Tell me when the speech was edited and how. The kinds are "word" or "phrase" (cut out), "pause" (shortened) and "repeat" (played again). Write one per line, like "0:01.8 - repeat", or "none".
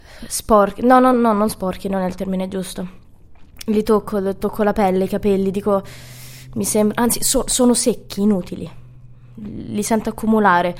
none